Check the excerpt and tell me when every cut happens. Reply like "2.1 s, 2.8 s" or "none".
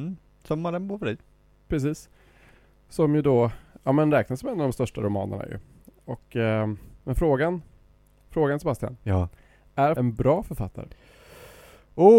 10.0 s

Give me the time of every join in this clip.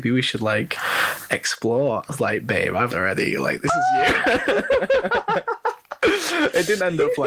2.1 s, 2.9 s

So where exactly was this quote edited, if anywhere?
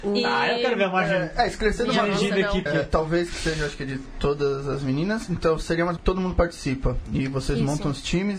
2.7 s, 6.0 s

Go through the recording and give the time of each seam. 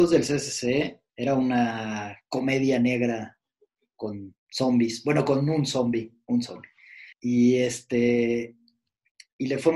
1.1 s, 4.4 s, 7.1 s

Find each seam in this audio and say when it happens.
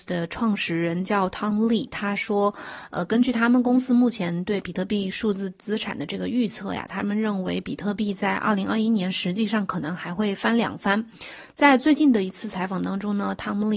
none

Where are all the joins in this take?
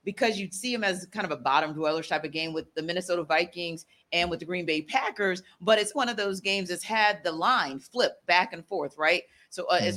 5.9 s

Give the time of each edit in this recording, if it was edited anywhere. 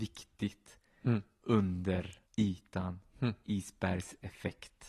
2.3 s

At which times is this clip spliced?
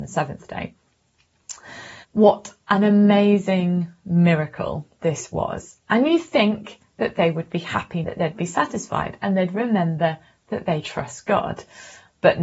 2.0 s, 8.0 s, 10.8 s

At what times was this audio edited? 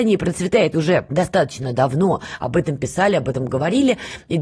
none

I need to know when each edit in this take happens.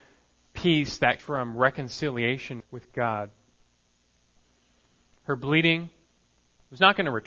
1.2 s, 2.6 s

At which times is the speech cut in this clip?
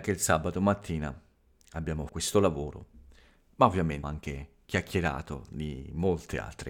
2.1 s, 4.0 s

